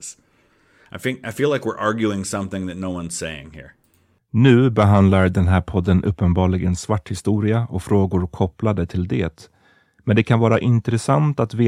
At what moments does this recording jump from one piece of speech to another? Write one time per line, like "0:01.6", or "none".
none